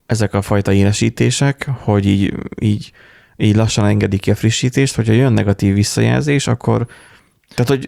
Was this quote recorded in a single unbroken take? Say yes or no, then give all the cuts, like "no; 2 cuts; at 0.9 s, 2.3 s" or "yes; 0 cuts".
yes; 0 cuts